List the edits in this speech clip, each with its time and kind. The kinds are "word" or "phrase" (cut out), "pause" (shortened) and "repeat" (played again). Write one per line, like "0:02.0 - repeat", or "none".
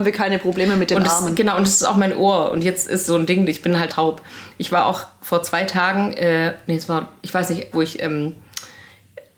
0:03.1 - word
0:03.9 - word
0:07.7 - phrase